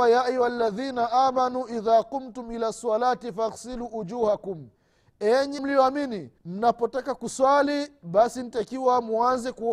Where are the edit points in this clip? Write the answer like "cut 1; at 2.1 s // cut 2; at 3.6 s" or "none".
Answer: cut 1; at 5.6 s // cut 2; at 6.4 s